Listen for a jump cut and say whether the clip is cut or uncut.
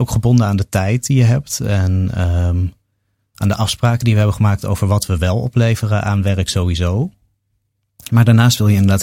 uncut